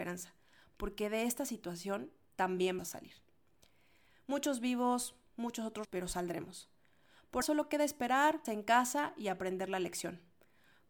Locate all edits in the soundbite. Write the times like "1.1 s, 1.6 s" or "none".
2.8 s, 5.8 s, 7.4 s, 8.4 s